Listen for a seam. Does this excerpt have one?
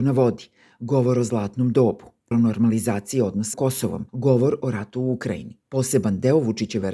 yes; 4 cuts; at 2.3 s, 3.5 s, 4.1 s, 5.6 s

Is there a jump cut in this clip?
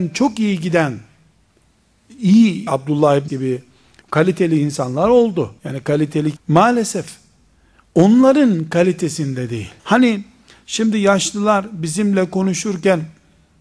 yes; 6 cuts; at 2.7 s, 3.3 s, 4.0 s, 5.6 s, 6.4 s, 9.8 s

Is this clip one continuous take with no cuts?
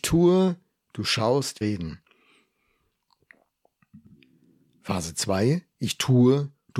no; 1 cut; at 1.6 s

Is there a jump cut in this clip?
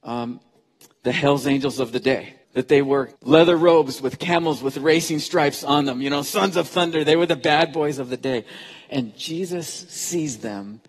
yes; 2 cuts; at 2.4 s, 3.2 s

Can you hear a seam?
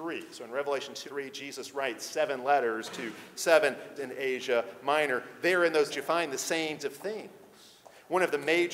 yes; 4 cuts; at 1.1 s, 4.0 s, 5.9 s, 6.8 s

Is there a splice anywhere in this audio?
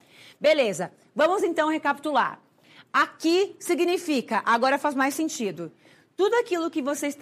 no; 0 cuts

